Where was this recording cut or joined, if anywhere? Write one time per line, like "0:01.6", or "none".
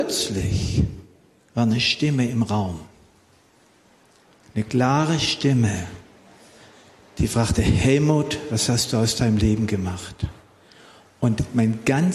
none